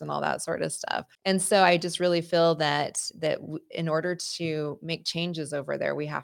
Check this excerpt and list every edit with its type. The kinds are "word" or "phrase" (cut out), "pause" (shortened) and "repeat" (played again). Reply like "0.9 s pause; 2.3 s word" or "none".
1.1 s pause